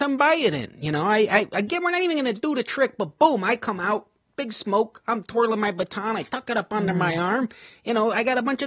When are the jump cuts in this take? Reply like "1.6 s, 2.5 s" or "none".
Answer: none